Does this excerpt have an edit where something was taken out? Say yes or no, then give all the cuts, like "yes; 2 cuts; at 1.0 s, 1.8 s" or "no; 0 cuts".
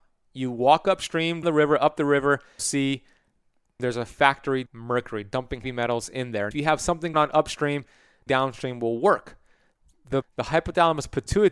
yes; 9 cuts; at 1.4 s, 2.6 s, 3.8 s, 4.7 s, 5.6 s, 6.5 s, 7.1 s, 8.3 s, 10.2 s